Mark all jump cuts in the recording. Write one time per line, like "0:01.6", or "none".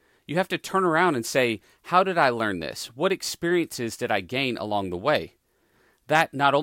none